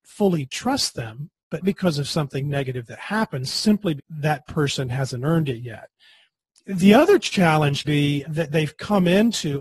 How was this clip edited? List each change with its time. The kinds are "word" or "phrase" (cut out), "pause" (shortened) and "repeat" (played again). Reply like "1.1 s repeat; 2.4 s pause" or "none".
1.6 s word; 4.0 s word; 7.8 s word; 8.2 s word